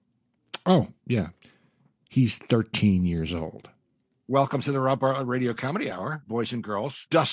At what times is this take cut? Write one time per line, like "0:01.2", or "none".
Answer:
none